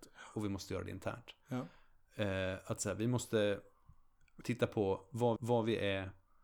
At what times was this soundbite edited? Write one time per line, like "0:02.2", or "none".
0:04.4
0:05.4